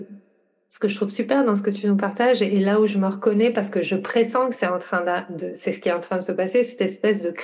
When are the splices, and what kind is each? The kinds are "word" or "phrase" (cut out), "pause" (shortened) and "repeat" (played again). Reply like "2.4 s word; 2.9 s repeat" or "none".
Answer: none